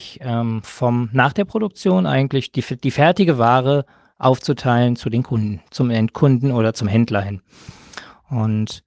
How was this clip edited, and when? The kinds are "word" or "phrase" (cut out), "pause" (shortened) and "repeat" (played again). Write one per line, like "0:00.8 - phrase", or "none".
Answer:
none